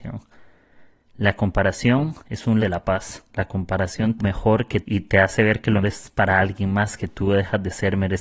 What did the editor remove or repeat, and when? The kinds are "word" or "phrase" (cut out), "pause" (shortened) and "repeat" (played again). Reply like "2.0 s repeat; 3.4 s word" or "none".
2.2 s pause; 2.6 s word; 3.3 s pause; 4.2 s phrase; 4.8 s phrase; 5.8 s word